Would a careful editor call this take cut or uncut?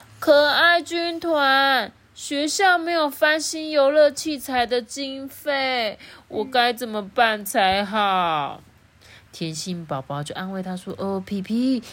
uncut